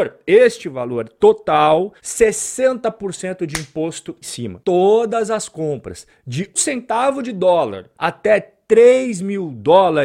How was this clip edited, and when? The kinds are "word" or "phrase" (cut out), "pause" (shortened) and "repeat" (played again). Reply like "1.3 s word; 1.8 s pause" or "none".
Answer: 2.0 s pause; 4.2 s word; 6.6 s word; 7.9 s pause